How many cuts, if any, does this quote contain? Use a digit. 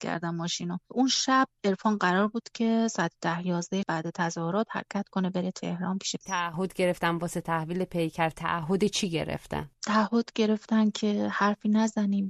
2